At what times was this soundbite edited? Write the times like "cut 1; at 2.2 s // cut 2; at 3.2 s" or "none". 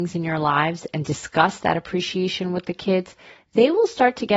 none